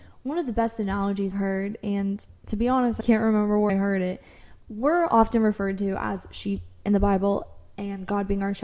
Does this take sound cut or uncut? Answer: cut